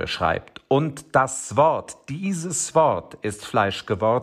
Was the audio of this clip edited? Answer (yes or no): no